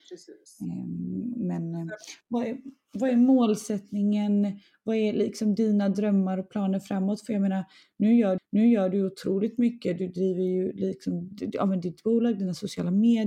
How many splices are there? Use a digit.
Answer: 1